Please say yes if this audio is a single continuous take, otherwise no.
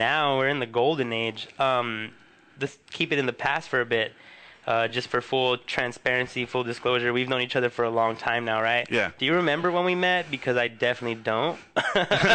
yes